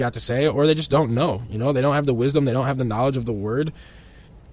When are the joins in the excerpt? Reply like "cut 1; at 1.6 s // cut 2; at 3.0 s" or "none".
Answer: none